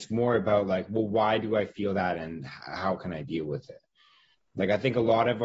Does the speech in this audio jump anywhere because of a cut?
no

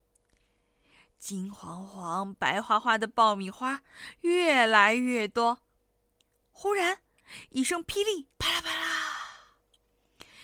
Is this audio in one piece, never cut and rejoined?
no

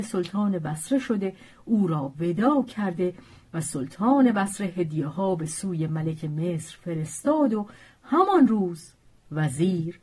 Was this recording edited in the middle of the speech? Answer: no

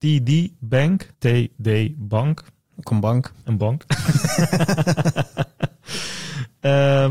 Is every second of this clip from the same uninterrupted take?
no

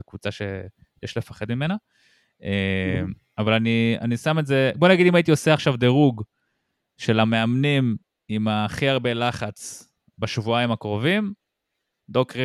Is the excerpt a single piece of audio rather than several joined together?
yes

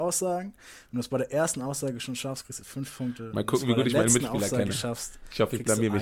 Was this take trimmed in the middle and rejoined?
no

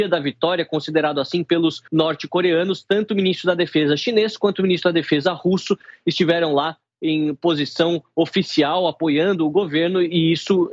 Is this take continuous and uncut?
no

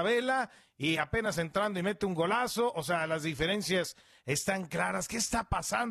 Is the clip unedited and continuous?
yes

